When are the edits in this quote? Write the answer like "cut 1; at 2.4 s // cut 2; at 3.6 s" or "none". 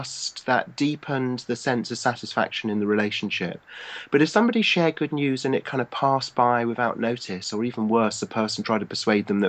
none